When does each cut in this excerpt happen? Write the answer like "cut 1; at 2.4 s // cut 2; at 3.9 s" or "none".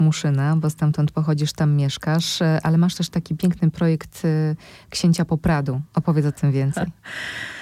none